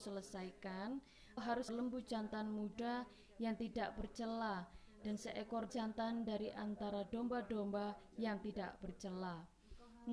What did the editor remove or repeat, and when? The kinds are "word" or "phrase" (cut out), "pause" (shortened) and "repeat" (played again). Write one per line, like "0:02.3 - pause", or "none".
0:01.4 - word
0:01.7 - phrase
0:05.7 - word